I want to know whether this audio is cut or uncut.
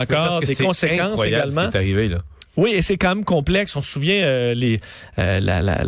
uncut